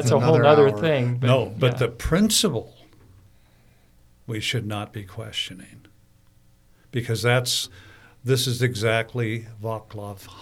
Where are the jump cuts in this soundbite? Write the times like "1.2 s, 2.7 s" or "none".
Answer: none